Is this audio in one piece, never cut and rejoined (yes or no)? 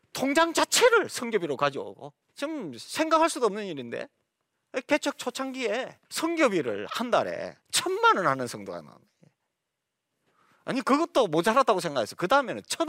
no